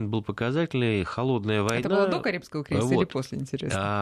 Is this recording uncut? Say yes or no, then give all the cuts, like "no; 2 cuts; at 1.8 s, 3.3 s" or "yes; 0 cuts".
yes; 0 cuts